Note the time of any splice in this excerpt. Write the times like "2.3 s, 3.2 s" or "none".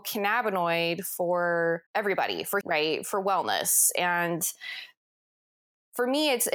1.9 s, 2.6 s